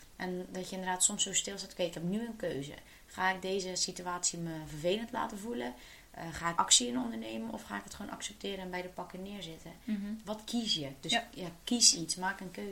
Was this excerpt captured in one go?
no; 1 cut; at 6.6 s

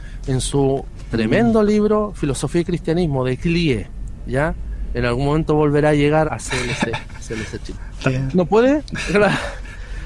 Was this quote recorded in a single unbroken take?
no; 2 cuts; at 6.3 s, 8.1 s

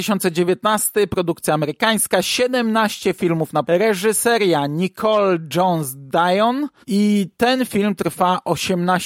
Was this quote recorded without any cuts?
no; 2 cuts; at 3.6 s, 6.8 s

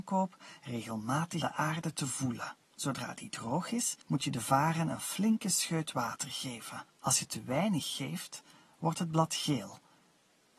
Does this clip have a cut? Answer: yes; 4 cuts; at 1.4 s, 2.6 s, 4.0 s, 6.9 s

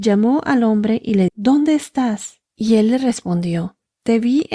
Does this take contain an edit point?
yes; 2 cuts; at 1.3 s, 2.5 s

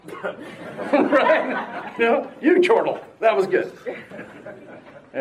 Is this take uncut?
no; 1 cut; at 2.0 s

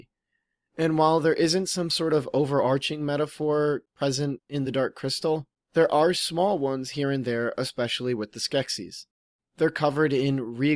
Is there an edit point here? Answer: no; 0 cuts

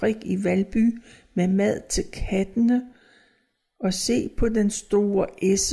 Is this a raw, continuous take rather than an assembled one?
yes; 0 cuts

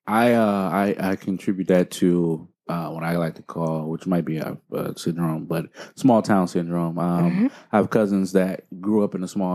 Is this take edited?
no; 0 cuts

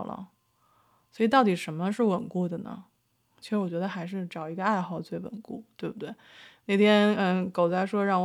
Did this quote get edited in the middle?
no; 0 cuts

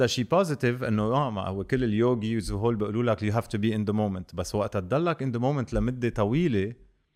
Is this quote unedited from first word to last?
yes; 0 cuts

